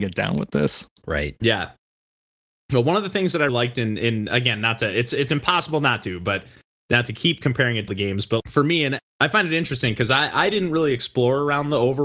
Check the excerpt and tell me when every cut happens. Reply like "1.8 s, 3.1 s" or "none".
3.5 s, 7.9 s, 8.4 s, 9.0 s